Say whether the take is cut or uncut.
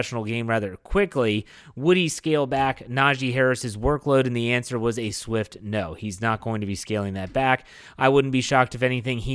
uncut